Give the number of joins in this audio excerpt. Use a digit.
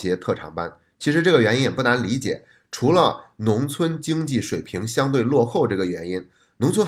0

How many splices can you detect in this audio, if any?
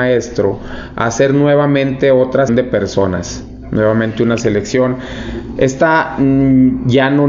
1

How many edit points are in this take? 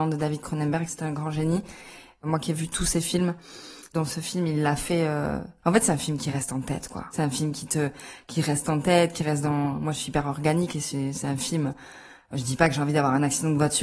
0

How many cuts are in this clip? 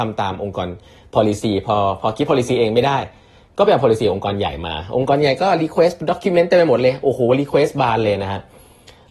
0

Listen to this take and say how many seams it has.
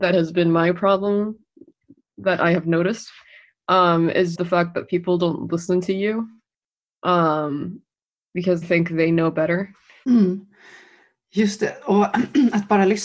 2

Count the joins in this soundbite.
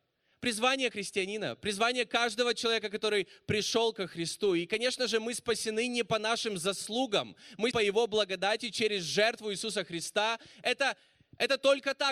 2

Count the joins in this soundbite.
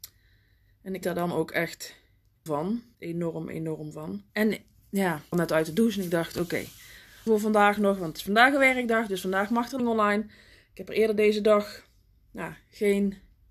7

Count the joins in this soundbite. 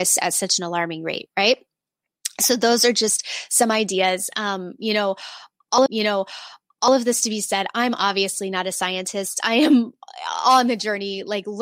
1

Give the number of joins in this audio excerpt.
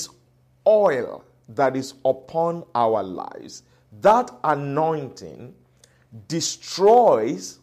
0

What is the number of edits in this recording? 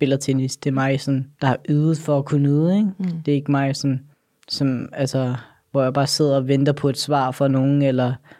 2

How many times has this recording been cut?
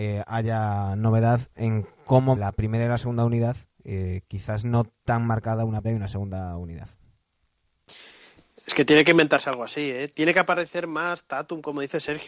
2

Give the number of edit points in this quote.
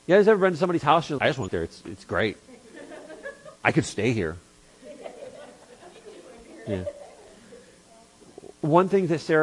4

